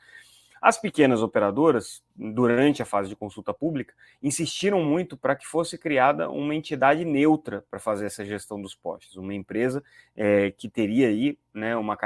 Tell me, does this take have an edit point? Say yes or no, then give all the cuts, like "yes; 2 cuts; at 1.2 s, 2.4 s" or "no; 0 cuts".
no; 0 cuts